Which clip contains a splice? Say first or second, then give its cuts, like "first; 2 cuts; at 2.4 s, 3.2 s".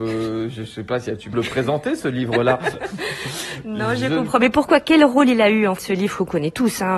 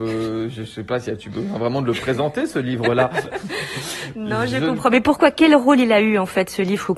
first; 2 cuts; at 1.3 s, 5.8 s